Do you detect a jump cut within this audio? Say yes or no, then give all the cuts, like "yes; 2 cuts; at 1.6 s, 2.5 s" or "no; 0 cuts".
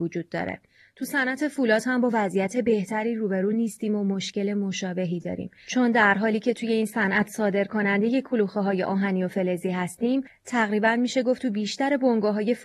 no; 0 cuts